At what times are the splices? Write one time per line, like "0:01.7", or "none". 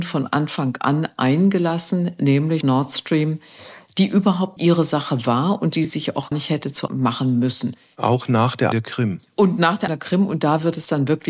0:02.6
0:04.6
0:05.8
0:06.3
0:06.9
0:08.7
0:09.9